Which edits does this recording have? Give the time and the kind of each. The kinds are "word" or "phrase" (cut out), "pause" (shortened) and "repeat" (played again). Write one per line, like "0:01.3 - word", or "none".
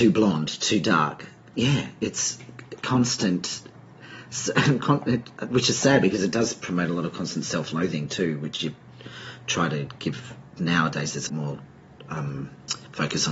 0:01.5 - word
0:11.3 - word